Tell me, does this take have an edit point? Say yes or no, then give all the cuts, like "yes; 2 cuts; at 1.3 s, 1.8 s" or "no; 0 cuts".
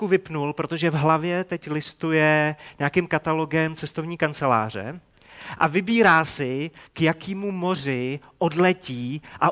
no; 0 cuts